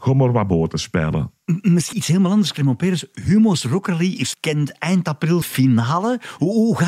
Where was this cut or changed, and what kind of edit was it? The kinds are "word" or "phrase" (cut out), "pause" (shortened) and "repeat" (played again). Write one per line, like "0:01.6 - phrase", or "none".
0:01.9 - word
0:04.3 - phrase
0:05.4 - word